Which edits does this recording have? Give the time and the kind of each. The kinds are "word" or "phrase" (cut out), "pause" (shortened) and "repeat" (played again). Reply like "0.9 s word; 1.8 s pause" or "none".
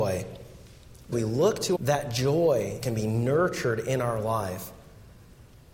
1.1 s word; 1.7 s phrase; 2.8 s phrase

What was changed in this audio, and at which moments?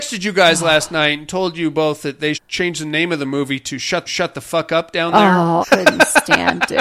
2.3 s word; 4.1 s repeat; 5.6 s word

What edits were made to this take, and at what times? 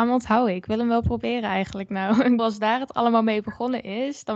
2.4 s word

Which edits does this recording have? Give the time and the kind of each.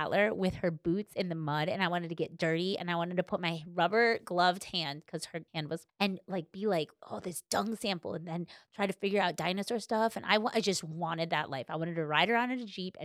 5.5 s pause; 5.9 s word

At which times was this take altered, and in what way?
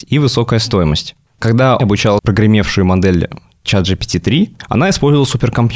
1.8 s word; 2.2 s word

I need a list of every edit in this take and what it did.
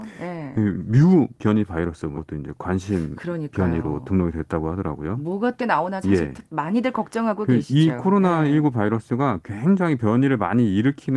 2.2 s word; 5.6 s word

